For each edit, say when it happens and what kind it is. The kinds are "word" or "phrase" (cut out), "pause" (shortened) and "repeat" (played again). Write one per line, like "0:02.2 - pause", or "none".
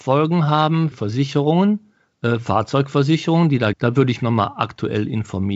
0:00.9 - word
0:03.7 - word
0:04.2 - word